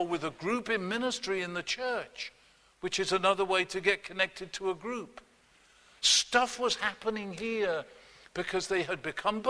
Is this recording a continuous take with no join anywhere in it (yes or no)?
yes